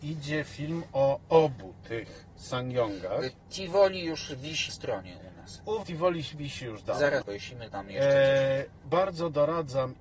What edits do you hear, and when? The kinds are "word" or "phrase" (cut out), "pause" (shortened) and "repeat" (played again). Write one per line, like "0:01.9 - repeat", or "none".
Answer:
0:02.3 - pause
0:04.7 - word
0:05.8 - word
0:07.2 - word
0:07.7 - word
0:08.8 - word

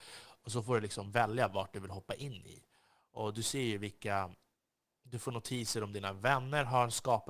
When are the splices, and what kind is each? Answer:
none

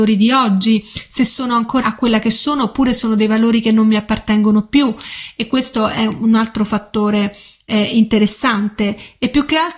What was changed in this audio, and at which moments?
0:01.8 - word

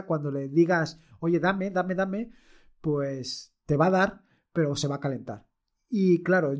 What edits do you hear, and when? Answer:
none

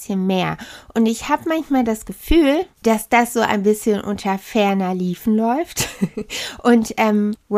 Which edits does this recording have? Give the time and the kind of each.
0:02.7 - pause

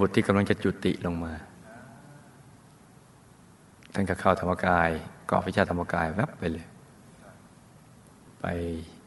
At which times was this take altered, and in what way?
none

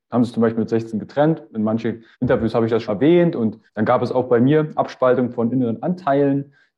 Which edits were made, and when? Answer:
0:02.1 - pause
0:02.9 - word
0:03.7 - pause

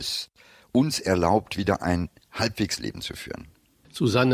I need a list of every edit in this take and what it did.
0:02.8 - word

